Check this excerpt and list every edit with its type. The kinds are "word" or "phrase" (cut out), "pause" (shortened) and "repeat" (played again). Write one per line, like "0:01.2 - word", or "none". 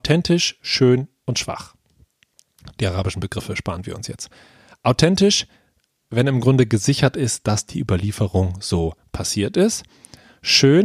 none